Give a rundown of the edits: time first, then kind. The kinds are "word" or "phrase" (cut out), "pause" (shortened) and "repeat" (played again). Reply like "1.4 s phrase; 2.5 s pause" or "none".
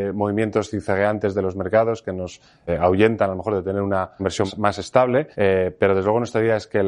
5.3 s pause